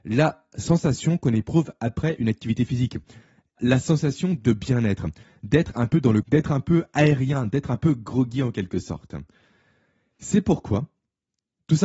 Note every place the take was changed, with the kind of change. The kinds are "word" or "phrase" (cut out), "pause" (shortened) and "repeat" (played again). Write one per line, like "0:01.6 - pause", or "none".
0:03.6 - word
0:04.4 - word
0:06.2 - word